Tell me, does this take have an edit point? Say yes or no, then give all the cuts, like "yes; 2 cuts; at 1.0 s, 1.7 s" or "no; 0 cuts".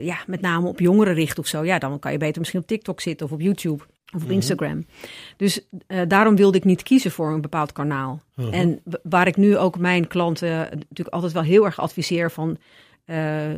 yes; 1 cut; at 3.9 s